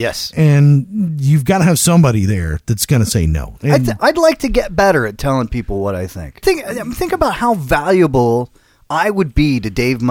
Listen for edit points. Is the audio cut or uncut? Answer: uncut